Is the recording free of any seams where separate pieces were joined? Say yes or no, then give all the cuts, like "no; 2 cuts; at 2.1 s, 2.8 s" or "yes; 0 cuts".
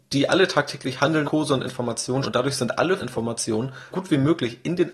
no; 4 cuts; at 1.2 s, 2.2 s, 3.0 s, 3.9 s